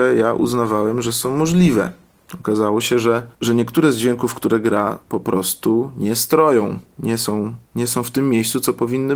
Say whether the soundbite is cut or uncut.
cut